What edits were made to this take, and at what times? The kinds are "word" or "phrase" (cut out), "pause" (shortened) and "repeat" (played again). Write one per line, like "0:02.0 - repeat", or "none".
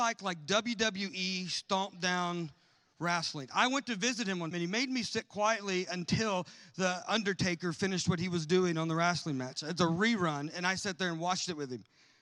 0:04.5 - word